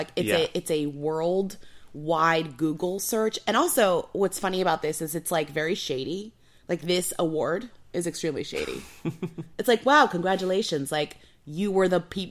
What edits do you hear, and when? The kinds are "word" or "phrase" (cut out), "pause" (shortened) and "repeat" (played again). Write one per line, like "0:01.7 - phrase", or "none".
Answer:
none

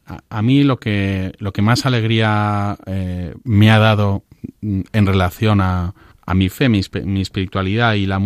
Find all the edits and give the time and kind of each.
0:06.1 - pause

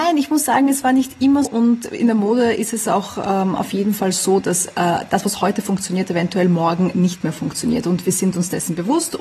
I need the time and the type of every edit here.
0:01.4 - word

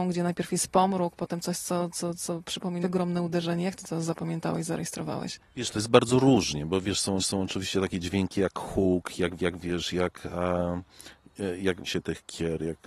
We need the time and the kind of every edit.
0:02.8 - word
0:07.2 - repeat
0:09.4 - repeat
0:11.9 - phrase

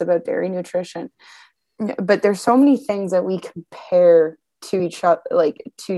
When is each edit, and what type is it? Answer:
none

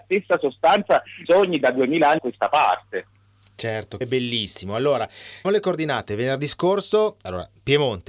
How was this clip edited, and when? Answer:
0:01.3 - phrase
0:02.2 - word
0:04.0 - word
0:05.4 - word

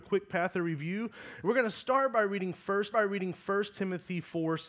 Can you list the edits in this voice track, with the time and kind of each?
0:02.9 - repeat

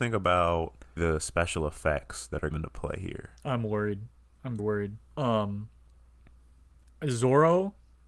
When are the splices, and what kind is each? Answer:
0:01.0 - word
0:02.5 - phrase
0:04.6 - word
0:05.1 - pause

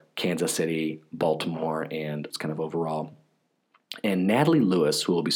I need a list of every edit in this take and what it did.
0:02.3 - phrase

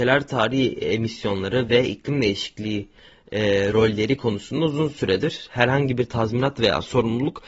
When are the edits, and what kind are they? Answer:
none

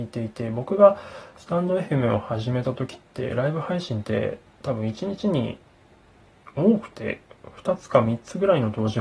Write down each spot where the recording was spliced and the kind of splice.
none

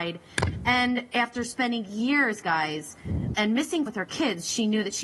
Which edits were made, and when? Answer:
0:02.4 - phrase
0:03.3 - word
0:03.9 - word

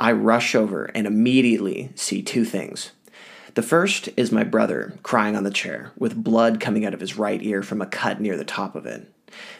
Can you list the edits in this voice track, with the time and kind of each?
none

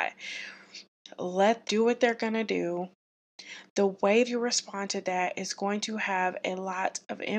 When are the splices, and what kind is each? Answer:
0:01.6 - word
0:04.2 - word

